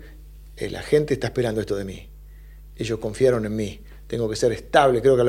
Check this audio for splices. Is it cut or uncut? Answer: uncut